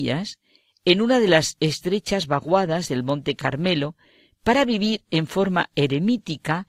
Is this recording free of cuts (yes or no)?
yes